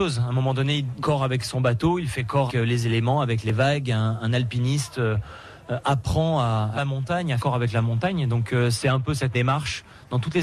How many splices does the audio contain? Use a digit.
5